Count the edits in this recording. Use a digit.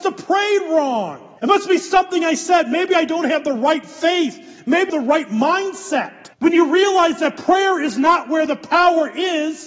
3